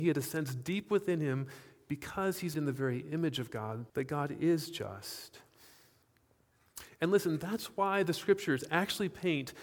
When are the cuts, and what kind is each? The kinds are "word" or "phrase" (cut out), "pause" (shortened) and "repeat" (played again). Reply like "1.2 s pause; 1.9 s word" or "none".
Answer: 2.5 s word; 3.9 s pause